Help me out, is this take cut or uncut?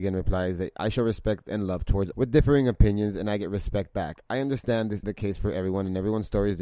cut